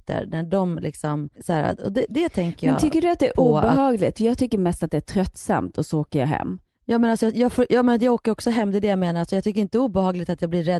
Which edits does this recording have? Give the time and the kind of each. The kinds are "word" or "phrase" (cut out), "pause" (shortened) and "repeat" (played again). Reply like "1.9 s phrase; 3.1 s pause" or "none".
1.3 s pause